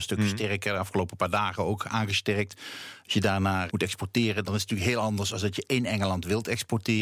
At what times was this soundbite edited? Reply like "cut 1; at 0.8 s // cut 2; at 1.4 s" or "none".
cut 1; at 3.7 s // cut 2; at 4.4 s